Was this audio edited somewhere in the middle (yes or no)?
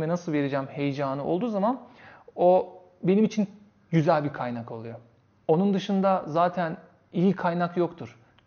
no